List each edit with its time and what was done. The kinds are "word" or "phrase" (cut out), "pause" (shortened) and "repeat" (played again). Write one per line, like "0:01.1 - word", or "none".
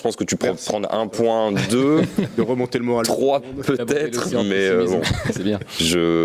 none